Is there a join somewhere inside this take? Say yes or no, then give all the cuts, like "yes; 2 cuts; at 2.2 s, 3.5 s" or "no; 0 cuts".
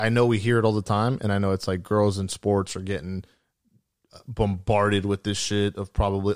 no; 0 cuts